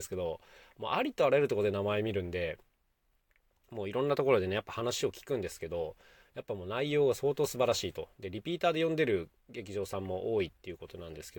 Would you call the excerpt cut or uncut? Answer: uncut